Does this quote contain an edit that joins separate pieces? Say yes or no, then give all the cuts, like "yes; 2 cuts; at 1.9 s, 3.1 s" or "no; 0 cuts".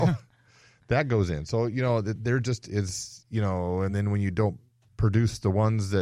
no; 0 cuts